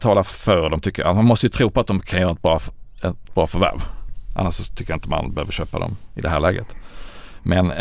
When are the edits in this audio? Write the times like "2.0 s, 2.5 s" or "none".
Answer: none